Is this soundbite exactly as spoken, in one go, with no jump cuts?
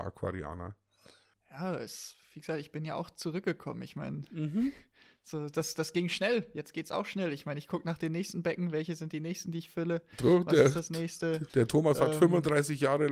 no; 2 cuts; at 2.2 s, 11.5 s

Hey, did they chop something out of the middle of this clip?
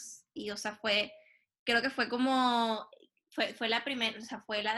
no; 0 cuts

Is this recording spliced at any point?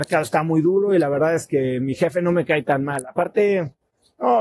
no; 0 cuts

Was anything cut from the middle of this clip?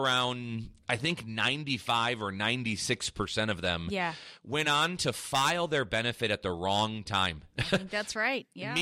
no; 0 cuts

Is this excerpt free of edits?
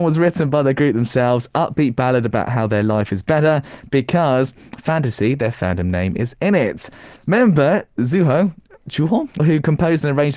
no; 2 cuts; at 7.2 s, 9.4 s

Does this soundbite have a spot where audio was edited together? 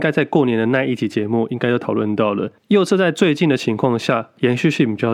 yes; 1 cut; at 2.6 s

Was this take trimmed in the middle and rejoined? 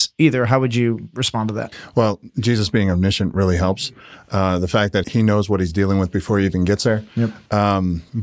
yes; 1 cut; at 5.0 s

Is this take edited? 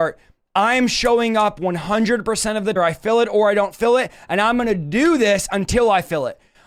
yes; 1 cut; at 2.8 s

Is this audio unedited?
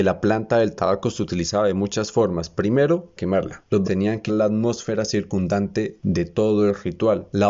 no; 3 cuts; at 3.2 s, 3.8 s, 4.3 s

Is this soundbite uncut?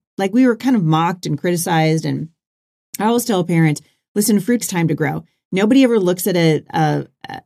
no; 1 cut; at 4.6 s

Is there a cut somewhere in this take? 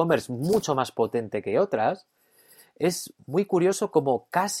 no; 0 cuts

